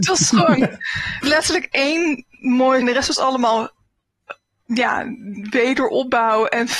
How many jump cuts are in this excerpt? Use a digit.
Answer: 2